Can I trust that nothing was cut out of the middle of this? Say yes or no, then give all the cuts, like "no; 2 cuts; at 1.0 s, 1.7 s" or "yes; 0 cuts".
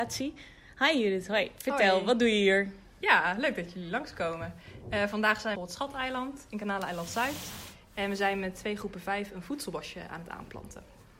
no; 1 cut; at 5.6 s